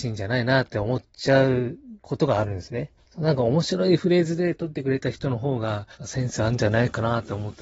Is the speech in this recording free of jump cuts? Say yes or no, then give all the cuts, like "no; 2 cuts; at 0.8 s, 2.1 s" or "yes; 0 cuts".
no; 4 cuts; at 1.1 s, 2.0 s, 3.0 s, 5.9 s